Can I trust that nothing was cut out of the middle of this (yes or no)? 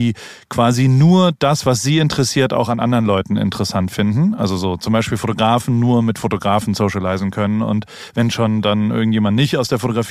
yes